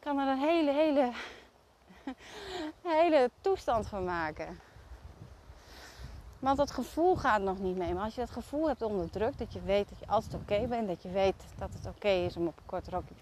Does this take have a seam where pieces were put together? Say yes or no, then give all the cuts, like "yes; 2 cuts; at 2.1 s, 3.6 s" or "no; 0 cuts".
no; 0 cuts